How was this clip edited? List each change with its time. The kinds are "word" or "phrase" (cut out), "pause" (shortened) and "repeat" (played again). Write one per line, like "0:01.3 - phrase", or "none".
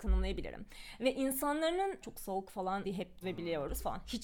0:02.0 - word
0:02.8 - word
0:03.2 - word